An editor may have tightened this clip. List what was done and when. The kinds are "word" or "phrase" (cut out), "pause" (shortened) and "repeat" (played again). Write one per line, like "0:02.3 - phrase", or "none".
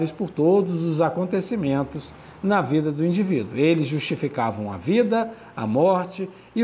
none